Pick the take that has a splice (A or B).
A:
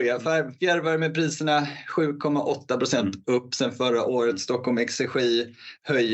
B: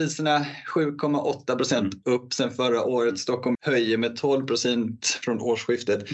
B